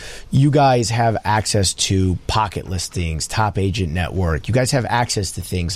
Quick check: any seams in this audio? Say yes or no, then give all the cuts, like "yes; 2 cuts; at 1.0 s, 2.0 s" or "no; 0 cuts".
no; 0 cuts